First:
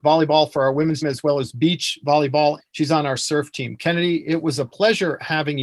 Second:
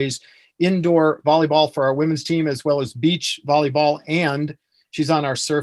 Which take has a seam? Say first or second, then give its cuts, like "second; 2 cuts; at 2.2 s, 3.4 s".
first; 2 cuts; at 1.0 s, 2.6 s